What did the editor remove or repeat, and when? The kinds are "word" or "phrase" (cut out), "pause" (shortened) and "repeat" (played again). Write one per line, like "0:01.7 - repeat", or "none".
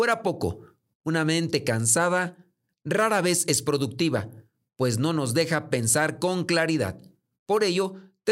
none